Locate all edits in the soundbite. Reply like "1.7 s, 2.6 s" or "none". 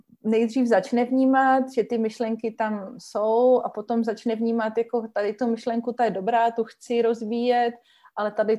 none